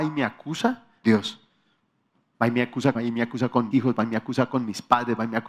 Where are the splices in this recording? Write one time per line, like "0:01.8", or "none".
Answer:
0:01.0
0:02.9
0:03.7